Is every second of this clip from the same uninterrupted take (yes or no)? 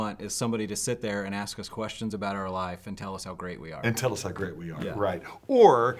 yes